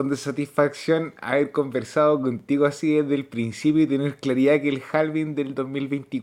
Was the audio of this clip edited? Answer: no; 0 cuts

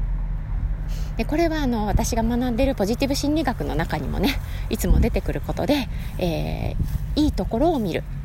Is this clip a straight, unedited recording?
yes; 0 cuts

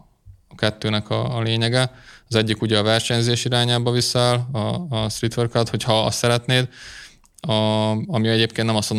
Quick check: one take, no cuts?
yes; 0 cuts

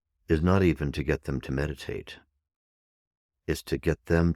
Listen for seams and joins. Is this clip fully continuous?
yes; 0 cuts

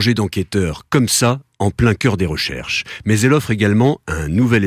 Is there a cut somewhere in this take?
no; 0 cuts

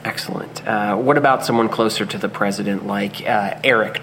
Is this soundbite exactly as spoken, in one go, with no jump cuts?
yes; 0 cuts

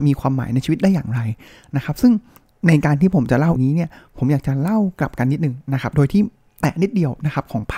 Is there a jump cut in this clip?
yes; 1 cut; at 3.6 s

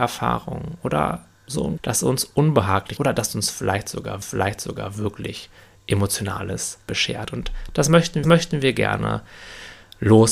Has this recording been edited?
yes; 6 cuts; at 1.3 s, 1.8 s, 3.0 s, 4.2 s, 6.8 s, 8.2 s

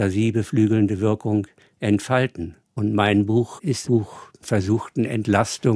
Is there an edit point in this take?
yes; 3 cuts; at 2.6 s, 3.8 s, 4.4 s

